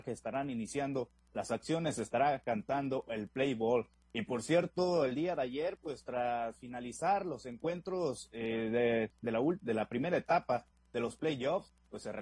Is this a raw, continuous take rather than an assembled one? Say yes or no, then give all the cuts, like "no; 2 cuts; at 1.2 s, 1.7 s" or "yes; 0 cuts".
yes; 0 cuts